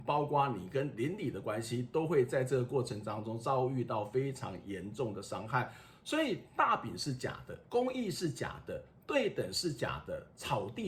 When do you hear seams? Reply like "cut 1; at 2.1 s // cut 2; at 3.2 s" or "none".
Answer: cut 1; at 7.6 s